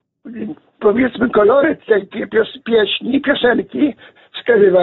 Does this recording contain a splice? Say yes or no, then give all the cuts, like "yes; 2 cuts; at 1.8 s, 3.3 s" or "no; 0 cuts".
no; 0 cuts